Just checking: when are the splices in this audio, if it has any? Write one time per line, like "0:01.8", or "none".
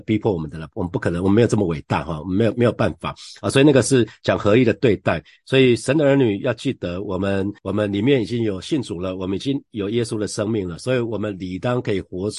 0:07.6